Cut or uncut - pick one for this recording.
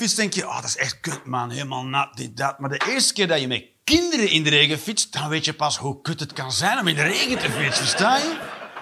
uncut